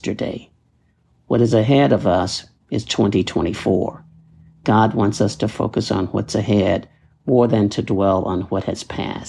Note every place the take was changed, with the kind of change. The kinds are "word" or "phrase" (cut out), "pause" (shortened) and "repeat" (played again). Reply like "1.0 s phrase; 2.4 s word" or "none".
none